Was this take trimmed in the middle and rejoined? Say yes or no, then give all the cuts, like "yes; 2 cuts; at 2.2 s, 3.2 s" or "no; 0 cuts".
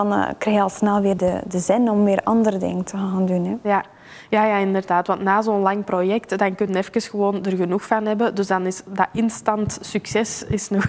no; 0 cuts